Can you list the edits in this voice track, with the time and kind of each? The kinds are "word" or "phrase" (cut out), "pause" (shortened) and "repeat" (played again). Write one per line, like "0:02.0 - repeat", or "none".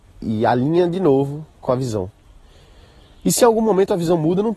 none